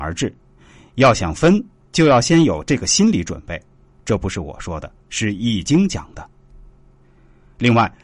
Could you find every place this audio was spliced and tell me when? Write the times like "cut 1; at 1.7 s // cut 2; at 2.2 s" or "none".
none